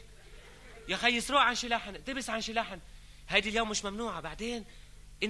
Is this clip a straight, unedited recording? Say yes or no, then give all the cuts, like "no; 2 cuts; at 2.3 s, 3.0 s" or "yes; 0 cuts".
yes; 0 cuts